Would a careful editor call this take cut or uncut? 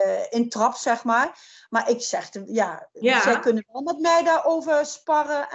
uncut